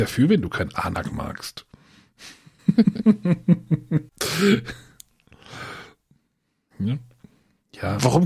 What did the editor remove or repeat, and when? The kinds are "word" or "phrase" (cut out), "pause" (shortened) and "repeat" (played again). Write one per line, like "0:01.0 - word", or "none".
0:04.1 - pause